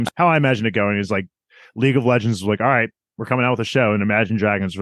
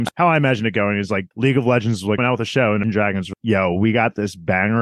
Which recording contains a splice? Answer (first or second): second